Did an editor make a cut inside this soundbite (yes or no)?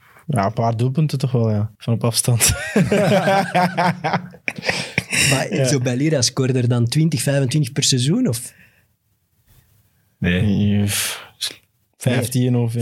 yes